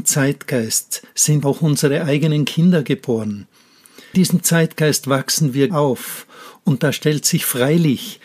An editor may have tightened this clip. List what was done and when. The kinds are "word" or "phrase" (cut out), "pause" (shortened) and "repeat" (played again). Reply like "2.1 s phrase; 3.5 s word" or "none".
1.4 s word; 4.1 s word; 5.7 s word